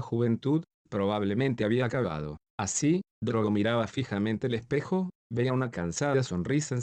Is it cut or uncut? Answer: uncut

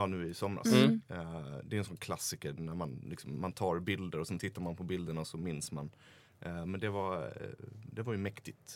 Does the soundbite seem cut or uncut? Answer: uncut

